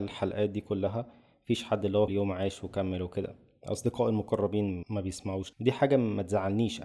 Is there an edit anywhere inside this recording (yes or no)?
yes